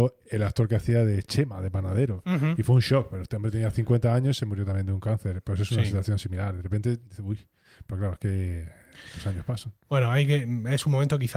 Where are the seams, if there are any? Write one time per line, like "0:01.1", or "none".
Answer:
0:07.1